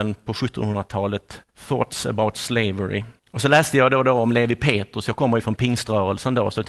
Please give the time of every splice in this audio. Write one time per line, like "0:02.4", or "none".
0:01.5
0:03.2